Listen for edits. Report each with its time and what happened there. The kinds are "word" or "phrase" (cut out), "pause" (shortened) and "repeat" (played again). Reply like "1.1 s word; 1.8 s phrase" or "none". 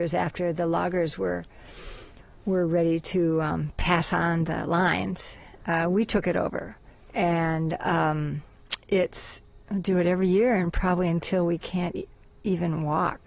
7.0 s pause